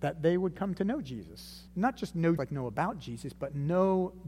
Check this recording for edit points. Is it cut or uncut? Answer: cut